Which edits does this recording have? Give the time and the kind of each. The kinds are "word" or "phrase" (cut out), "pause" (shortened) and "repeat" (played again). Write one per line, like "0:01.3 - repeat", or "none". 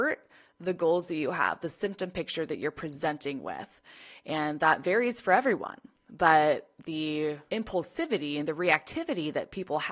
none